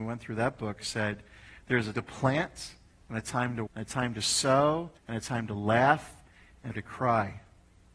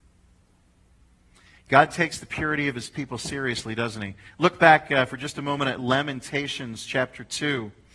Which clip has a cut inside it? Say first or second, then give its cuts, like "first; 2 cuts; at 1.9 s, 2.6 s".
first; 4 cuts; at 1.9 s, 3.7 s, 5.0 s, 6.7 s